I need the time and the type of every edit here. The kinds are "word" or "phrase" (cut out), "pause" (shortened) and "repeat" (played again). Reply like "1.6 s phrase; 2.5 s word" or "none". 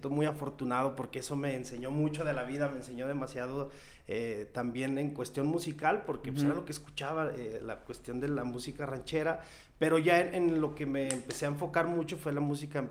none